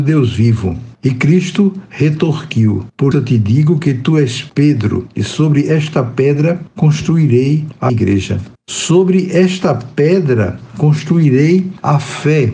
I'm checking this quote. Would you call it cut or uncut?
cut